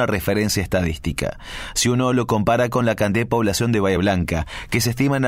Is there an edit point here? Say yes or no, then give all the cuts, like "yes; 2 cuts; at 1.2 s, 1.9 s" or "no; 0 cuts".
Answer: no; 0 cuts